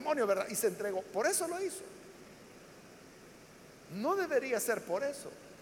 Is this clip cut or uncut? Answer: uncut